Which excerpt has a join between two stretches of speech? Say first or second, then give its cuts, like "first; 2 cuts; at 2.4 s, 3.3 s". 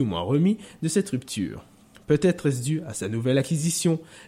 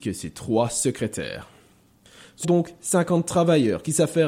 second; 1 cut; at 2.4 s